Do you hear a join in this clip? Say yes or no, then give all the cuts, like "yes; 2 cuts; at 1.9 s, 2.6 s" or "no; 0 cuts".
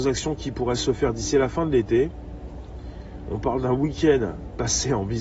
no; 0 cuts